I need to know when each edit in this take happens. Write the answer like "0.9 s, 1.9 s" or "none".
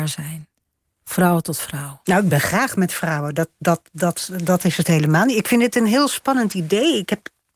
none